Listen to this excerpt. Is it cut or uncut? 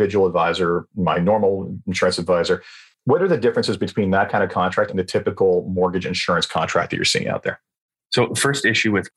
uncut